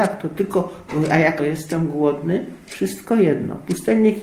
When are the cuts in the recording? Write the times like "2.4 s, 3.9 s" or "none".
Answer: 1.4 s